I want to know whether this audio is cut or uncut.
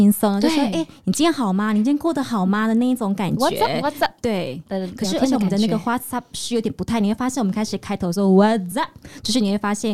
uncut